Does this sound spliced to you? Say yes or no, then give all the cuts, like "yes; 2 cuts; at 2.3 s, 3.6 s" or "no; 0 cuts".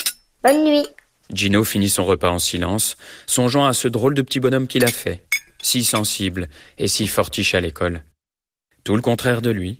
no; 0 cuts